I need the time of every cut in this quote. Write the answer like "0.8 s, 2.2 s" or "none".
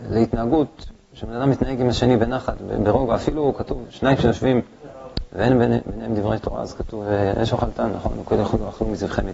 none